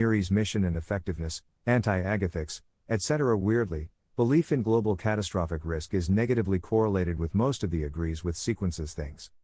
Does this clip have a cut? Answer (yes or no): no